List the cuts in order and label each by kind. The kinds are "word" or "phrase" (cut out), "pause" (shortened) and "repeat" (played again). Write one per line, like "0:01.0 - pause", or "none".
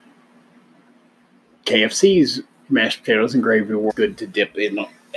0:03.9 - word